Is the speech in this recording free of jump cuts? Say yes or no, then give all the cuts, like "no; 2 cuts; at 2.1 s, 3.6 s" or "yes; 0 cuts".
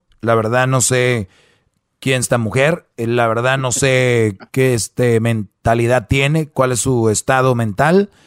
no; 3 cuts; at 2.2 s, 2.9 s, 4.5 s